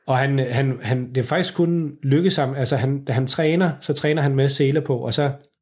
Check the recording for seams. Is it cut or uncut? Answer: uncut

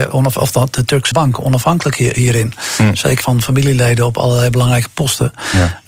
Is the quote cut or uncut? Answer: cut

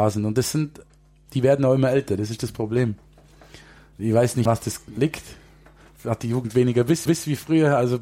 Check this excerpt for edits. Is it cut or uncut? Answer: cut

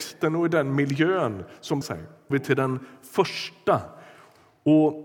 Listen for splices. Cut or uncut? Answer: cut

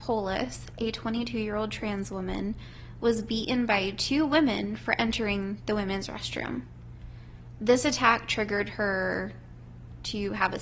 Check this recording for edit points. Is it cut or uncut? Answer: uncut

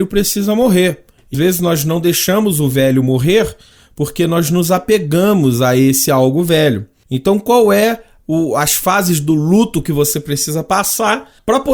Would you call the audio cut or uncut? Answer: cut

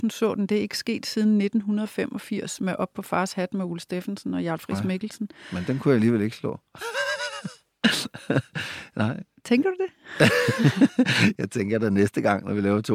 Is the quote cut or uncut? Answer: uncut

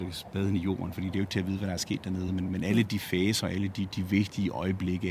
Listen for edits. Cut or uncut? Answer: uncut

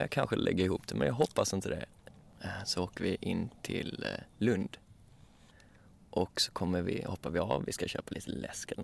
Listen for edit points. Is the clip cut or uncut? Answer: uncut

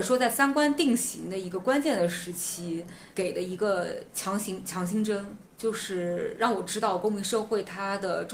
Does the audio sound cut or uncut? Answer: cut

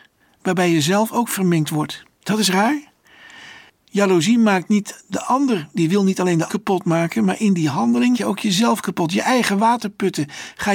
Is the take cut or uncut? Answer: cut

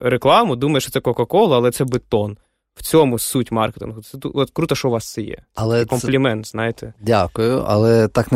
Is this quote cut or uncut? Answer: uncut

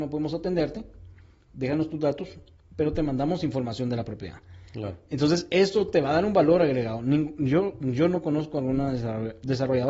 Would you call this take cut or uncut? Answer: uncut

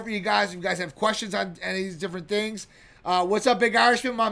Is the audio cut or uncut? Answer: uncut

